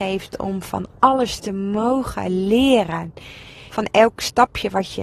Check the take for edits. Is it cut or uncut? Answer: cut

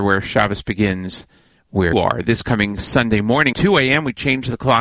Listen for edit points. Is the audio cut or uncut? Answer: cut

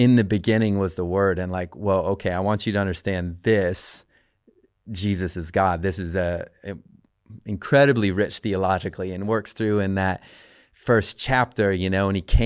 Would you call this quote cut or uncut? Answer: uncut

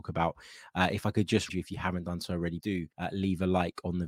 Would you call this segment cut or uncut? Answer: cut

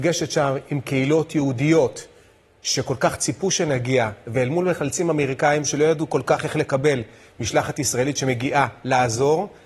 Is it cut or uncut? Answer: uncut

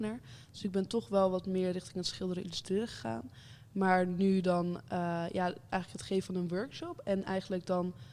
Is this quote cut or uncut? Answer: uncut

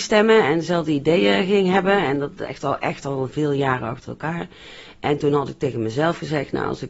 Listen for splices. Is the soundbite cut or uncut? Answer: uncut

